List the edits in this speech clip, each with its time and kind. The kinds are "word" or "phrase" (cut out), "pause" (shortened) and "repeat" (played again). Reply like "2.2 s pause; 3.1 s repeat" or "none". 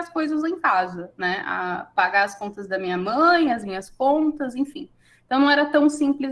none